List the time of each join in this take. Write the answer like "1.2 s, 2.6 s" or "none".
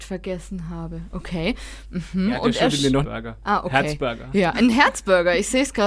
3.0 s